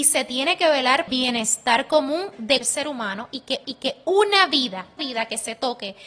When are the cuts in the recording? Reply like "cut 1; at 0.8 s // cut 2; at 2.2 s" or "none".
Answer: cut 1; at 1.1 s // cut 2; at 2.6 s // cut 3; at 3.6 s // cut 4; at 5.0 s